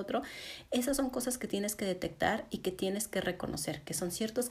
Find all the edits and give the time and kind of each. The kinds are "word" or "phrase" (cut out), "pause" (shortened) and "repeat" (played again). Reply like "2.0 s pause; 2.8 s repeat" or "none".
none